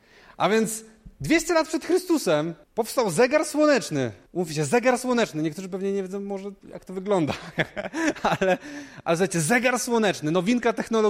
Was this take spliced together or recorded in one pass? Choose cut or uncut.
cut